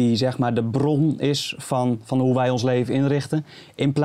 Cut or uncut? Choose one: uncut